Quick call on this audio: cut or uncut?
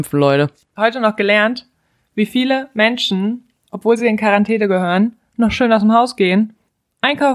uncut